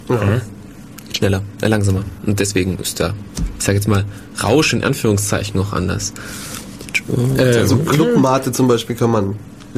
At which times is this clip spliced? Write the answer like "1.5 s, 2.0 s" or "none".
none